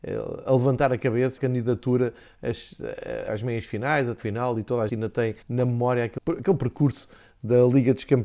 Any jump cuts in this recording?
yes; 6 cuts; at 1.4 s, 3.3 s, 4.2 s, 4.9 s, 5.4 s, 6.2 s

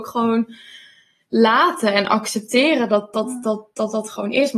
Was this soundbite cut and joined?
no; 0 cuts

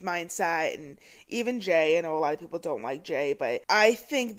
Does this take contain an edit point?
no; 0 cuts

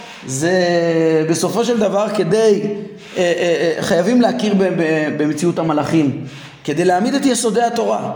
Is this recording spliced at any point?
no; 0 cuts

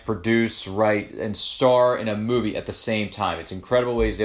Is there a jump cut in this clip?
no; 0 cuts

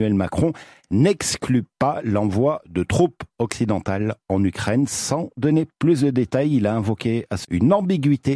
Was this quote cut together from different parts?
yes; 1 cut; at 7.4 s

